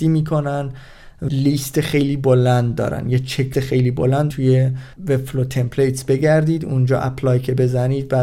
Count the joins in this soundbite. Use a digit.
4